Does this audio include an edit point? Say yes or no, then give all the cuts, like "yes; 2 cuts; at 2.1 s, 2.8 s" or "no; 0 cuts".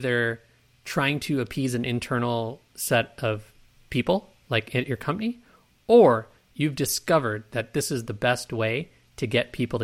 no; 0 cuts